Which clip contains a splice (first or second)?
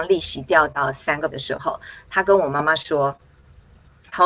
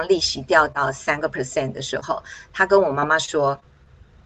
first